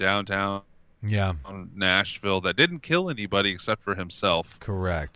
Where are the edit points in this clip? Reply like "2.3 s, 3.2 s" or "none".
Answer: none